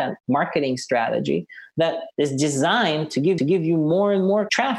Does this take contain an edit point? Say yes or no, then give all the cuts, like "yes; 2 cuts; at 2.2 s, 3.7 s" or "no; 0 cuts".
yes; 1 cut; at 3.4 s